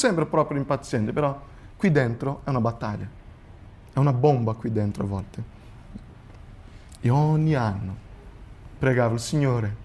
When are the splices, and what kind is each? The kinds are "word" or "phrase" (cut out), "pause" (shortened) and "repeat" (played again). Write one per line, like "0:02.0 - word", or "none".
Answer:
none

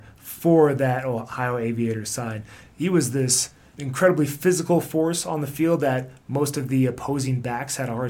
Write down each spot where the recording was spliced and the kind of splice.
none

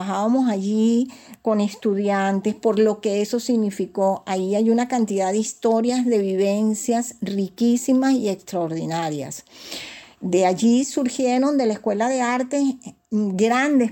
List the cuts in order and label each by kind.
none

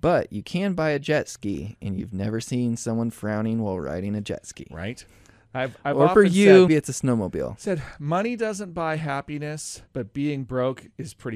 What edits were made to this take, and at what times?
0:06.7 - word
0:09.9 - pause

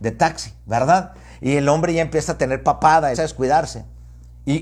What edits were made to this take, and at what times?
0:03.1 - phrase

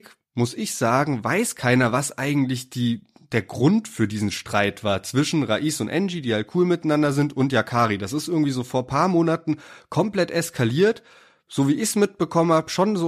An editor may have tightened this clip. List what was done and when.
none

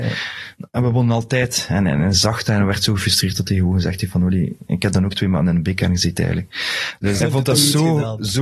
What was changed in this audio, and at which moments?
0:07.2 - word

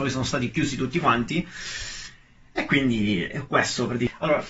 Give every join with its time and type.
none

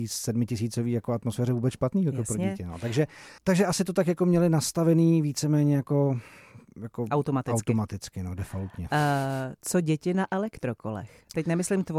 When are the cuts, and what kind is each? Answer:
0:03.4 - pause

